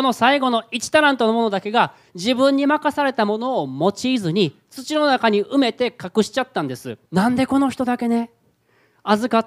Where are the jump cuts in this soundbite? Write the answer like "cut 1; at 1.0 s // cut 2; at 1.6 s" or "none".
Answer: cut 1; at 7.1 s